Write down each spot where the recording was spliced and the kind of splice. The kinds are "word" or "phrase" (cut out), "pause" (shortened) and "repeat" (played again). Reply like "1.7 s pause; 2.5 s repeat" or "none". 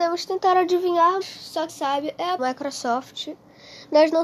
1.2 s word; 1.7 s word; 2.4 s phrase

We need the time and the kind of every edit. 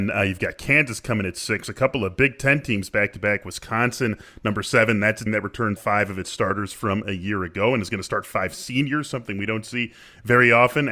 5.3 s word; 5.8 s word

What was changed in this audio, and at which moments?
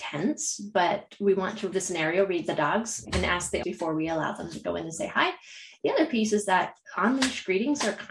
1.7 s word; 3.0 s word; 3.6 s word

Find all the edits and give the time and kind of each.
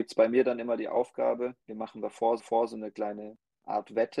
1.6 s pause; 2.4 s repeat

